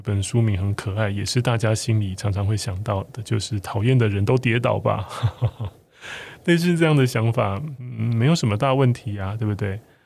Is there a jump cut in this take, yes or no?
no